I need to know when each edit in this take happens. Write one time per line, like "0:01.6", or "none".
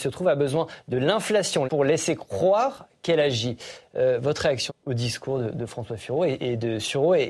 0:01.7
0:04.7